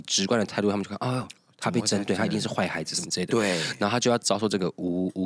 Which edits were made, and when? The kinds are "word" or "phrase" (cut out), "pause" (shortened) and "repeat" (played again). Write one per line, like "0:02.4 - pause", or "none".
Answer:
none